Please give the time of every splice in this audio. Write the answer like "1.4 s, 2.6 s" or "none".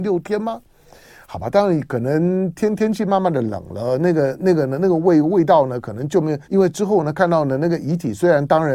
6.4 s